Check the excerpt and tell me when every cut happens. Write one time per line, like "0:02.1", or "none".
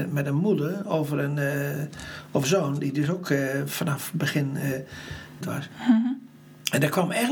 0:02.4
0:05.4

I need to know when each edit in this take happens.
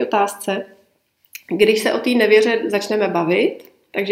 none

